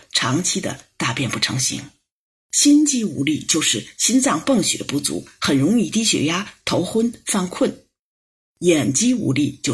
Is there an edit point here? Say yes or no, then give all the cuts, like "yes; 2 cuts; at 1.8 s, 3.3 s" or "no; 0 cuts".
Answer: no; 0 cuts